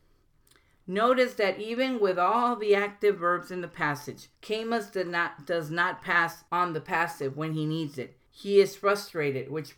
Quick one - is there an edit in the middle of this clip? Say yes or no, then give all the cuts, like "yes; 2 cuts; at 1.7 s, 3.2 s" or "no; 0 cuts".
yes; 3 cuts; at 4.3 s, 6.5 s, 8.3 s